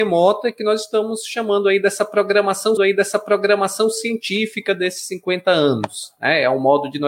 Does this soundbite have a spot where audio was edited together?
yes; 1 cut; at 2.8 s

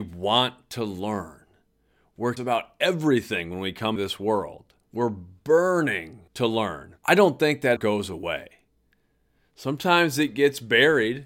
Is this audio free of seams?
no; 6 cuts; at 2.4 s, 4.0 s, 4.8 s, 6.3 s, 7.0 s, 7.8 s

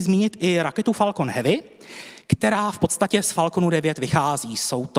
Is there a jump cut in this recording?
no; 0 cuts

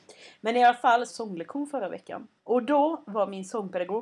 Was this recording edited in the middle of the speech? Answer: yes; 2 cuts; at 1.1 s, 2.4 s

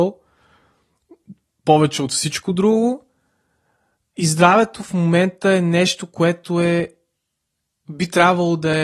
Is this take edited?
no; 0 cuts

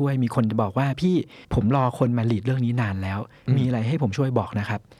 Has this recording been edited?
yes; 1 cut; at 1.4 s

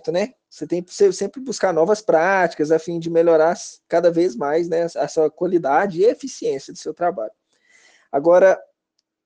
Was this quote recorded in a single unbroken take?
yes; 0 cuts

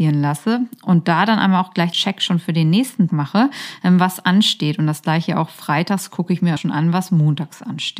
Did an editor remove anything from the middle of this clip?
yes; 3 cuts; at 1.9 s, 3.1 s, 6.6 s

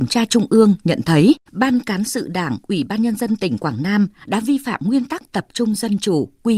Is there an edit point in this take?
yes; 1 cut; at 1.5 s

